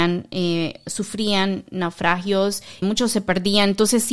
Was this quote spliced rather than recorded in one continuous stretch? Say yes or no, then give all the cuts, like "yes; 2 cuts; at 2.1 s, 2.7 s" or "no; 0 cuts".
yes; 1 cut; at 2.8 s